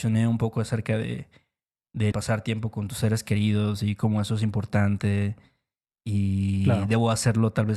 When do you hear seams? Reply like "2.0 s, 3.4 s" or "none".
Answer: 2.1 s

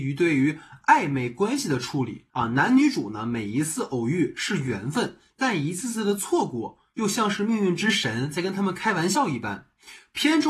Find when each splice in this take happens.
2.3 s

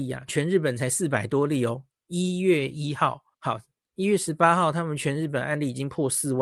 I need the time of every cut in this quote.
3.3 s

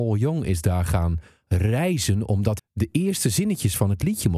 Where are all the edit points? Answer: 2.6 s

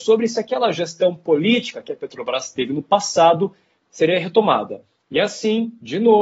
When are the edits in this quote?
none

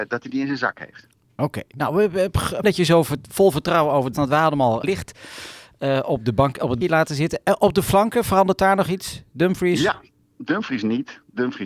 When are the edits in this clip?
2.6 s, 4.1 s, 4.8 s, 6.8 s

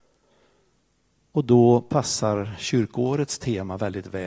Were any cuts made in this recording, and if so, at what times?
none

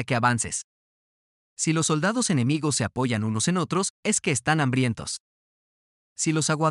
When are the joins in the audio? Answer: none

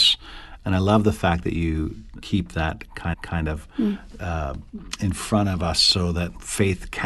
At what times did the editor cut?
2.2 s, 3.1 s

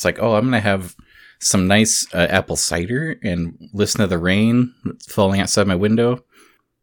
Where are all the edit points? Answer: none

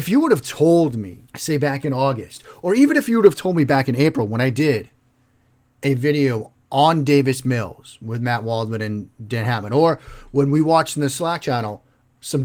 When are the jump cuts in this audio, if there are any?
1.3 s

